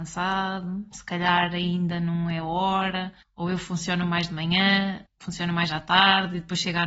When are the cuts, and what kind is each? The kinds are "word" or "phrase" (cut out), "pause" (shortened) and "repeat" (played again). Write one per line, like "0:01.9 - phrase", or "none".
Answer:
0:03.2 - pause
0:05.1 - pause

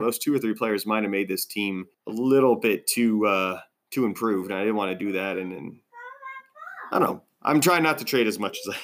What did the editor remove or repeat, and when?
0:01.9 - pause

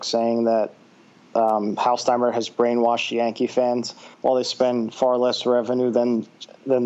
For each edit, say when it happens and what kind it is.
0:04.1 - pause

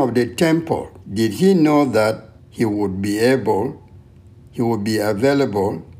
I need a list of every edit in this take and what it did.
0:01.0 - pause
0:02.4 - pause

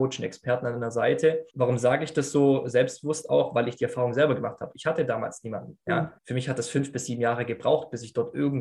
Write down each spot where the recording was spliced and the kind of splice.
0:01.5 - pause
0:05.8 - pause
0:06.2 - pause

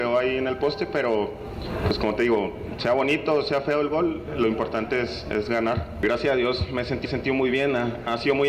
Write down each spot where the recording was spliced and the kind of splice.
0:07.0 - repeat

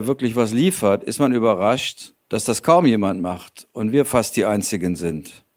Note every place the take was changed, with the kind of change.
0:02.2 - pause

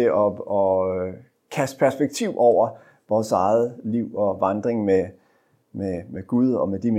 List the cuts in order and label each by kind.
none

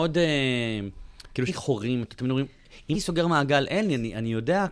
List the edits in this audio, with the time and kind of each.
0:01.5 - word
0:02.9 - word

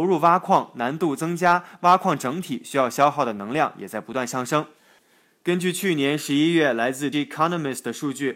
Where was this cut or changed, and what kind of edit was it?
0:07.1 - word

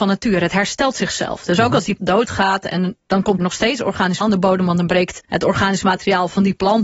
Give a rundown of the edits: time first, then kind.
0:02.0 - word
0:03.4 - word
0:04.2 - word
0:05.2 - pause

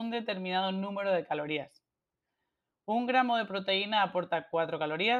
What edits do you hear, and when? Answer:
none

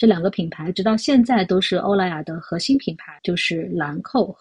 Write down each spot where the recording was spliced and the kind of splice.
0:03.2 - pause

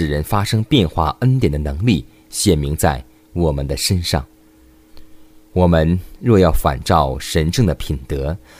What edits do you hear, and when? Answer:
none

